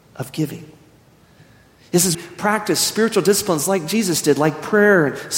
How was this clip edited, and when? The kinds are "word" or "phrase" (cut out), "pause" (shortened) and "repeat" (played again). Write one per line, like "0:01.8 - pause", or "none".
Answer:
0:02.1 - phrase